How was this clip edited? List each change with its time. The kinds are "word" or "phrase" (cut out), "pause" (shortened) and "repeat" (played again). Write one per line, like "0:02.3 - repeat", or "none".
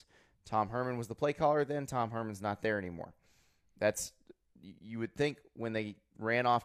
none